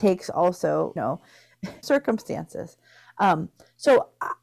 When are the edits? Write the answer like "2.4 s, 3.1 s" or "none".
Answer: 1.0 s, 1.8 s